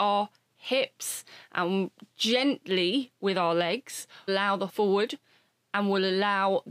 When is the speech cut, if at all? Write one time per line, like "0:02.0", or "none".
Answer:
0:04.3
0:04.7